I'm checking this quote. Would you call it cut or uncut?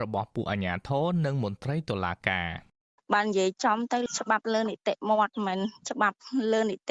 uncut